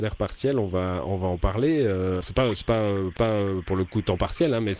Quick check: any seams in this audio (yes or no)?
yes